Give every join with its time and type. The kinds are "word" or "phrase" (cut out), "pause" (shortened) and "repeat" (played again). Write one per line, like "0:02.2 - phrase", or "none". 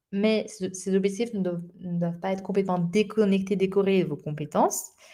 none